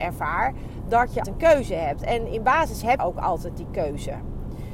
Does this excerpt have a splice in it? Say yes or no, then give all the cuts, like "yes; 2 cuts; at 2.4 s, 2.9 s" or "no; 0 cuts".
yes; 2 cuts; at 1.2 s, 3.0 s